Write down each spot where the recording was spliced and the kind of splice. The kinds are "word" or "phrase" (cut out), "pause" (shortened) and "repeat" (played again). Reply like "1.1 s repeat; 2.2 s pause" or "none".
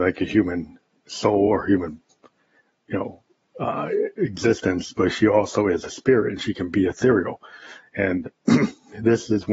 none